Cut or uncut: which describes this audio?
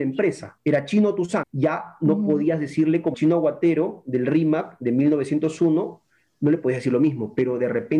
cut